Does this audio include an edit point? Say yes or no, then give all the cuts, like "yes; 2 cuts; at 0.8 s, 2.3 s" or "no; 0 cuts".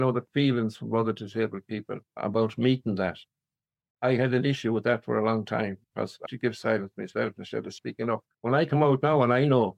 yes; 4 cuts; at 2.1 s, 5.8 s, 6.3 s, 8.3 s